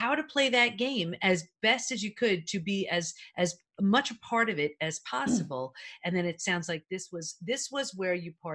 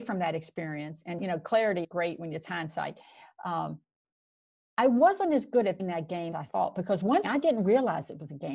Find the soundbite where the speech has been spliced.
second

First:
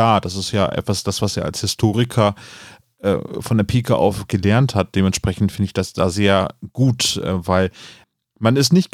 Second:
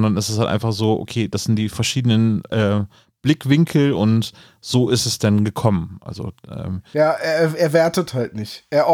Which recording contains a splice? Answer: first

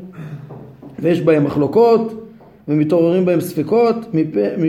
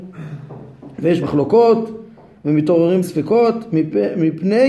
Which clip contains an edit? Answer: second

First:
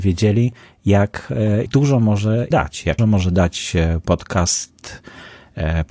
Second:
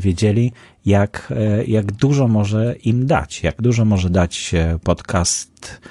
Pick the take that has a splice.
first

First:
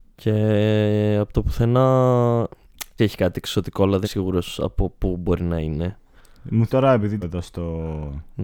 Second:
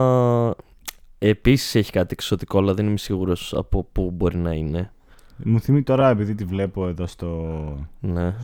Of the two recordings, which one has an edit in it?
first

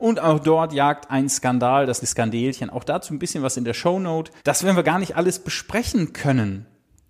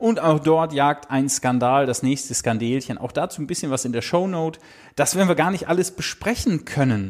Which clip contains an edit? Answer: first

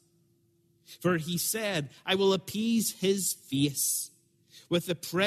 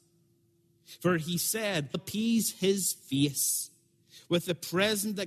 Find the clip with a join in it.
second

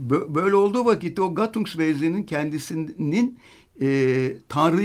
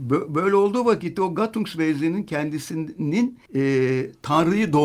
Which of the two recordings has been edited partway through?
second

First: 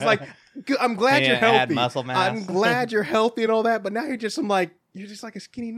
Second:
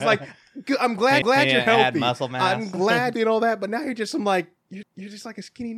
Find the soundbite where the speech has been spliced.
second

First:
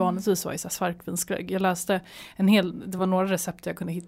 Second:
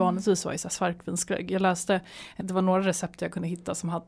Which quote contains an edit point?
second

